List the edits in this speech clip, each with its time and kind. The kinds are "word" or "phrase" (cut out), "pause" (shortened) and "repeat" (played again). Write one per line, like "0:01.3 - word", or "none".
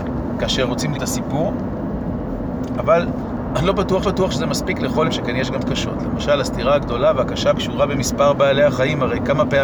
0:00.9 - word
0:04.0 - repeat
0:05.0 - word
0:05.6 - word
0:07.5 - word